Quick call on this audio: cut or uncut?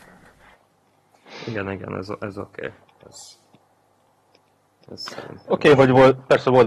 uncut